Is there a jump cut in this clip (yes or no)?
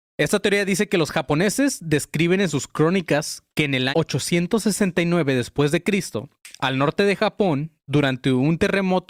yes